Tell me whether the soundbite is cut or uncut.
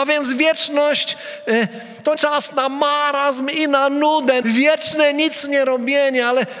cut